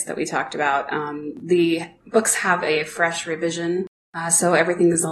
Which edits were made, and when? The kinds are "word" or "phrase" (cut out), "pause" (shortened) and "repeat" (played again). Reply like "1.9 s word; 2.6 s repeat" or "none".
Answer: none